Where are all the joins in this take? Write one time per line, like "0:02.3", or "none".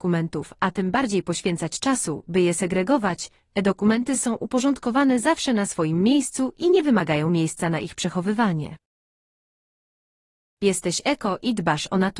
none